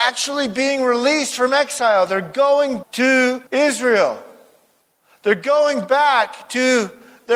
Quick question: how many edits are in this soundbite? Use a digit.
2